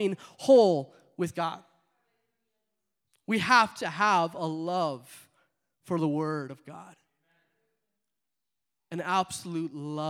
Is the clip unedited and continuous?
yes; 0 cuts

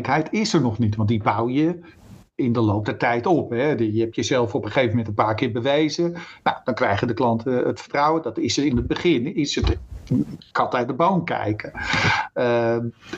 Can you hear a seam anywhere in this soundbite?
no; 0 cuts

